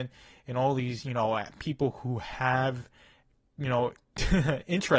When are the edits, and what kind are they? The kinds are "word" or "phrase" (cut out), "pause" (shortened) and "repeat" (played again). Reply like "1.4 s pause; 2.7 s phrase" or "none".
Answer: none